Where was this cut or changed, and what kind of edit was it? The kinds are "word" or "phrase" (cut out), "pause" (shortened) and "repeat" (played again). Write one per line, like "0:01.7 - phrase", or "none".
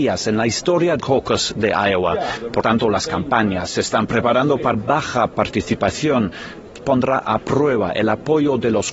0:01.0 - word
0:02.6 - word
0:04.7 - phrase
0:06.8 - word